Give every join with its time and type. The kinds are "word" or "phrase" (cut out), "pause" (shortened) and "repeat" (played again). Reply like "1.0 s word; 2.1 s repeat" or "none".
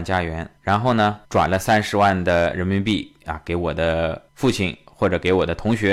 1.2 s pause; 4.3 s pause